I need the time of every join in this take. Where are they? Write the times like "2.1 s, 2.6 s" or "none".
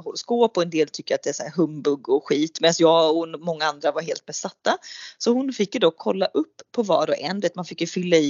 none

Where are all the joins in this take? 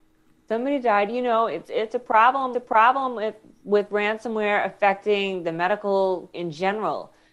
1.6 s, 2.5 s, 6.3 s

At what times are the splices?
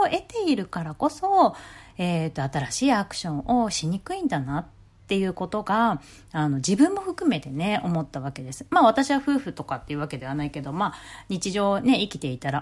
none

